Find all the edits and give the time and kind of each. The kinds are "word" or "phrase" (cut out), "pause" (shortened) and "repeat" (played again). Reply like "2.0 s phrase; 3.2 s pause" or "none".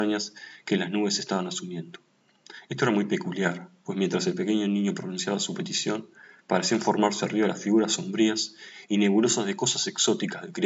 none